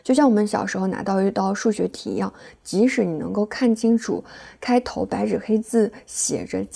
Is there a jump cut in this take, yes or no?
no